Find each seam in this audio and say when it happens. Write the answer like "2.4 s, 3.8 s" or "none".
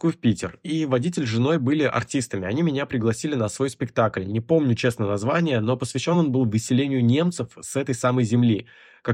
none